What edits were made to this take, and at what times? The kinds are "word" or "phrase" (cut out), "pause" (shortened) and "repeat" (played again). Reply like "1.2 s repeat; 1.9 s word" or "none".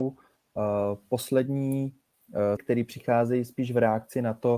2.6 s word